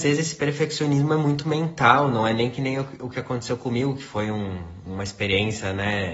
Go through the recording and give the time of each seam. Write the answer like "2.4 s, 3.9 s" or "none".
none